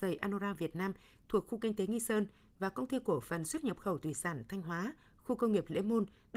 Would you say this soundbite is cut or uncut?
uncut